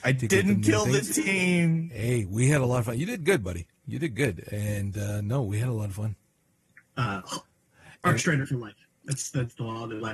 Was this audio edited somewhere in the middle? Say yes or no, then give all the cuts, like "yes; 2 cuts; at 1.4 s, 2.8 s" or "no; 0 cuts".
yes; 1 cut; at 6.6 s